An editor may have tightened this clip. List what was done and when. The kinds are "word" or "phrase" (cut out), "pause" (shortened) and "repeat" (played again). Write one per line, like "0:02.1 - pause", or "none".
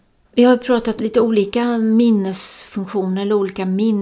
0:01.0 - word